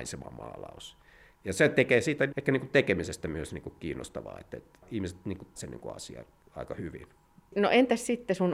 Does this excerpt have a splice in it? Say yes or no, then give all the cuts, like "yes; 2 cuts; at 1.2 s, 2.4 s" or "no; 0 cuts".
yes; 2 cuts; at 2.3 s, 5.6 s